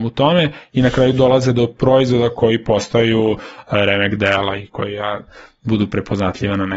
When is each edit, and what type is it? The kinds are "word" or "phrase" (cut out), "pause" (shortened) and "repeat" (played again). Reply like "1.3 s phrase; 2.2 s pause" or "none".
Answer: none

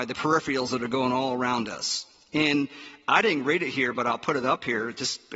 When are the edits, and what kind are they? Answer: none

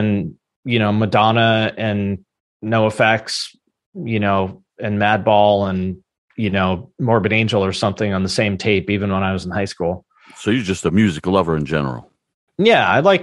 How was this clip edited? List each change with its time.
none

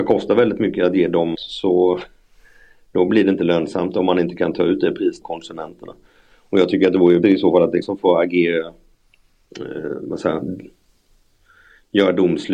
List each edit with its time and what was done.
1.3 s word; 5.2 s word; 7.2 s word; 7.8 s word

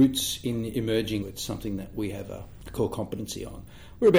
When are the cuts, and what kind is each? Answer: 1.2 s phrase

